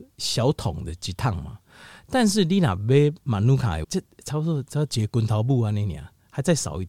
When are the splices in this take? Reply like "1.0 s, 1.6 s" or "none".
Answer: 3.8 s